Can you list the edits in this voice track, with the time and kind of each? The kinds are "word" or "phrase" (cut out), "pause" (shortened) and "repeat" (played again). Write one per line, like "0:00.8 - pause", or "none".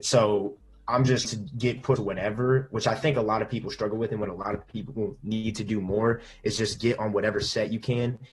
0:01.2 - word
0:02.0 - word

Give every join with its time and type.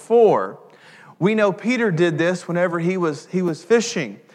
none

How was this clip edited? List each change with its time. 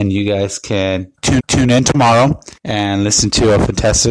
0:01.4 - repeat
0:02.6 - pause

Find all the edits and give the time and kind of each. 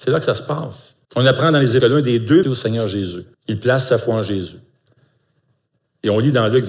0:01.0 - pause
0:01.8 - phrase
0:02.4 - phrase
0:03.3 - pause

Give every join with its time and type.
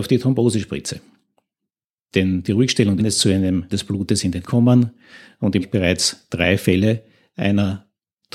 0:02.4 - word
0:03.0 - phrase
0:03.7 - word
0:04.5 - word
0:05.6 - phrase

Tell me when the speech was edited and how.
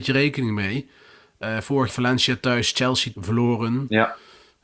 0:01.9 - word
0:03.1 - word

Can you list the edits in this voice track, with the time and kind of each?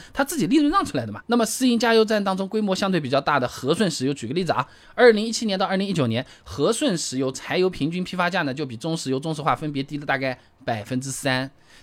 none

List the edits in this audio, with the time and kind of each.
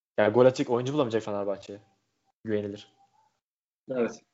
none

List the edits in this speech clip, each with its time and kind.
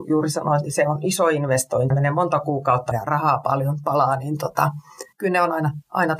0:01.9 - phrase
0:02.9 - word
0:05.1 - pause

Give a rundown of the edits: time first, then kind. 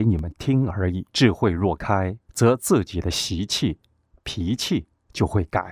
0:01.1 - pause
0:02.2 - pause

